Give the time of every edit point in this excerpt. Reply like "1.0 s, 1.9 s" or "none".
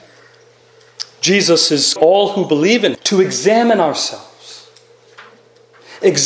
2.0 s, 2.9 s